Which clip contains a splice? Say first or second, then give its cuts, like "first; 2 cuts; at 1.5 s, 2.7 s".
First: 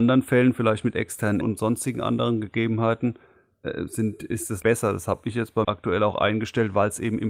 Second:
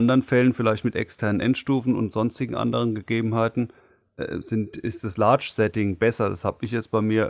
first; 3 cuts; at 1.4 s, 4.6 s, 5.6 s